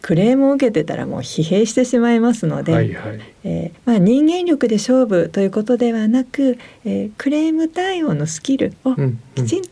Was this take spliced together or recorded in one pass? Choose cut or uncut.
uncut